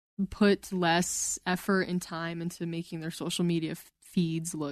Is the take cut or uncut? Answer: uncut